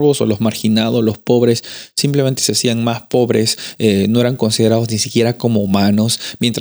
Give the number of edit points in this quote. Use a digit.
0